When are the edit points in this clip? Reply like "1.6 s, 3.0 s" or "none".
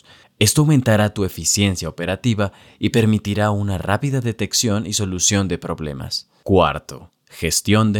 none